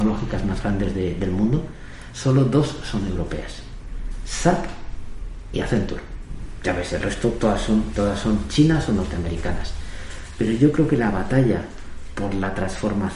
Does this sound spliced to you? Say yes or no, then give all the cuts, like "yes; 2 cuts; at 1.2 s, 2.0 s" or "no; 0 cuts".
no; 0 cuts